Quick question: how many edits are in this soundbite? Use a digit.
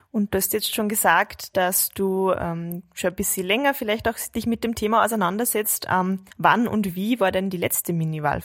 1